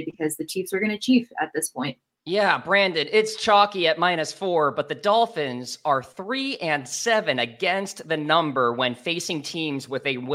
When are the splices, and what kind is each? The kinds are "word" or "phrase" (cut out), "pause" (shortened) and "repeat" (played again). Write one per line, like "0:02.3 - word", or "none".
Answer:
0:02.1 - pause

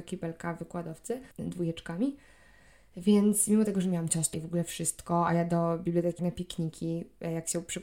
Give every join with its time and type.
0:01.3 - pause
0:04.3 - word
0:06.2 - phrase

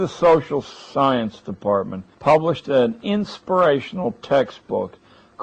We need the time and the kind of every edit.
0:02.1 - pause

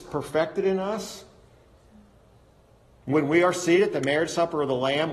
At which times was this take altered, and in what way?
none

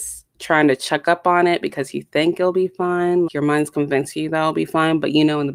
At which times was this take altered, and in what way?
0:03.3 - word

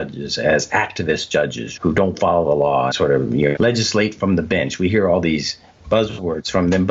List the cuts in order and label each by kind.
0:01.8 - word
0:02.9 - word
0:03.6 - word

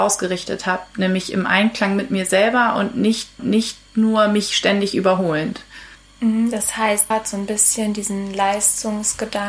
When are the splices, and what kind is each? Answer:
0:03.4 - repeat
0:05.9 - pause
0:07.1 - word

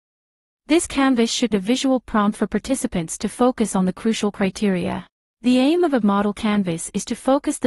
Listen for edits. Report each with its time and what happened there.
0:01.5 - word
0:05.1 - pause
0:06.0 - word

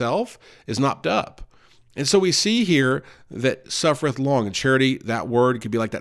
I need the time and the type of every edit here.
0:01.0 - word
0:03.6 - word

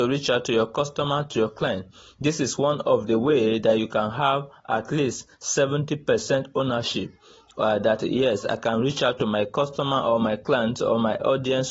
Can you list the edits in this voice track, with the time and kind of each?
none

